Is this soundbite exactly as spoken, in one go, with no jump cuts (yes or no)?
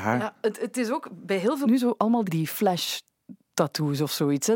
no